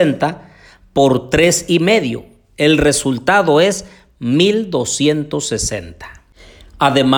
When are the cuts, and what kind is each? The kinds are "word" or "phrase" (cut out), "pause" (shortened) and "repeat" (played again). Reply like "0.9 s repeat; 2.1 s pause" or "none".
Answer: none